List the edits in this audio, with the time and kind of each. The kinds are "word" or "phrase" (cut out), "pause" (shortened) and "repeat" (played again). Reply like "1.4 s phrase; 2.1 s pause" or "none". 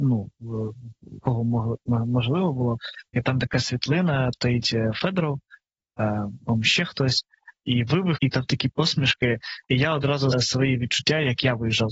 1.2 s phrase; 3.1 s pause; 4.3 s word; 8.2 s word; 9.6 s pause; 10.3 s word